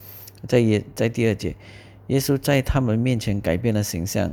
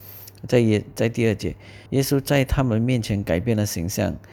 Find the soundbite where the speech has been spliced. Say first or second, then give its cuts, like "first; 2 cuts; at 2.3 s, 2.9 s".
second; 1 cut; at 1.9 s